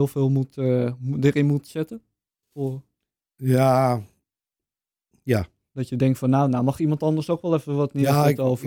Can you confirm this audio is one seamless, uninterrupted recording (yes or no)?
yes